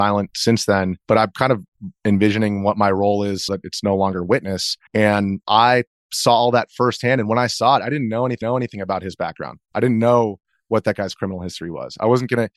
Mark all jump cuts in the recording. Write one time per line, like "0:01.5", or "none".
0:01.0
0:03.5
0:04.9
0:08.4